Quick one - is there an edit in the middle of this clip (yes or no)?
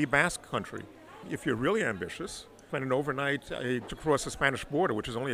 yes